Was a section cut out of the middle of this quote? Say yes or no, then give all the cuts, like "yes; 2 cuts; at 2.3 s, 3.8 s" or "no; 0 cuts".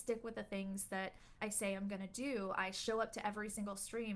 yes; 1 cut; at 1.4 s